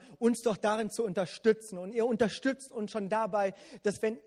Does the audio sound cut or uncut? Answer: uncut